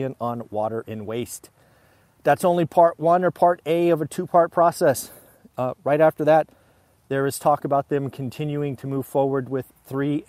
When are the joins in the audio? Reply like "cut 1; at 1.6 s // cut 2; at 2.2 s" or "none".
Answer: none

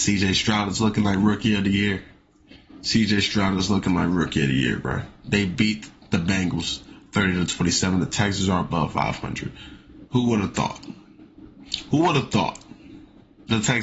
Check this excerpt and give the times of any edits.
cut 1; at 10.1 s

